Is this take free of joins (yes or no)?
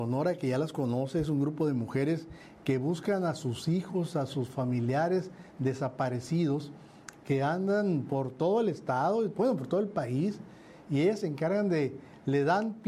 yes